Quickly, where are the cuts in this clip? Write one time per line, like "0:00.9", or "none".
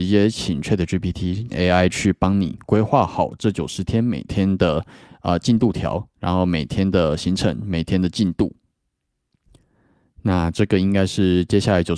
0:01.5